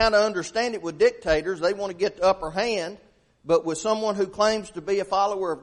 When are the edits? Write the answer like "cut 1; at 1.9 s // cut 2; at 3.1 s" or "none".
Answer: none